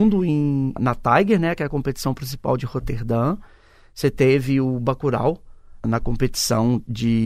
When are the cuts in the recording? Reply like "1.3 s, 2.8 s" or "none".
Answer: none